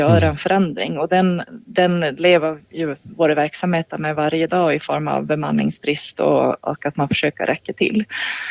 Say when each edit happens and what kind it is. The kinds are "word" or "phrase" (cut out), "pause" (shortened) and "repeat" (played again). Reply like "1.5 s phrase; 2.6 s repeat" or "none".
1.6 s pause